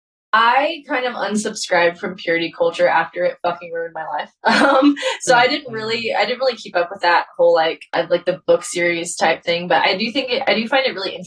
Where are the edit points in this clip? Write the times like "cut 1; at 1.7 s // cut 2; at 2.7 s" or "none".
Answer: cut 1; at 7.9 s